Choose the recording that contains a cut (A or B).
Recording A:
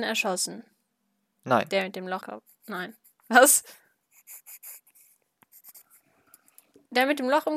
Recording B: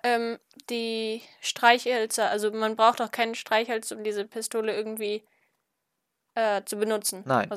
A